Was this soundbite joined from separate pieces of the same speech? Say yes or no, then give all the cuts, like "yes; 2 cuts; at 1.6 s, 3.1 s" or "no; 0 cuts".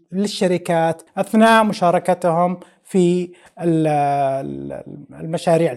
no; 0 cuts